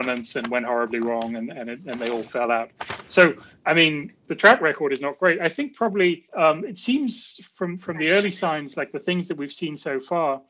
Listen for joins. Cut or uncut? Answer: cut